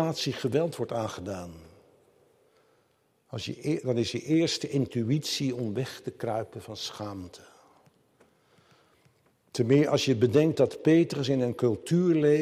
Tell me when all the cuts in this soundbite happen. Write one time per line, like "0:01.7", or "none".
none